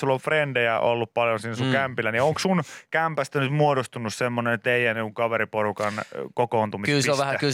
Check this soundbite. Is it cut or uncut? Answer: uncut